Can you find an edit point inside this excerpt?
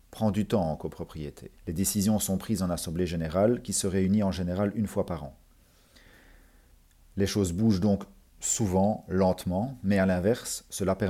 yes; 1 cut; at 1.6 s

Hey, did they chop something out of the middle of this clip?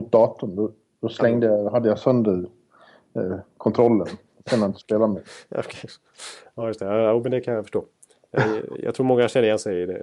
no; 0 cuts

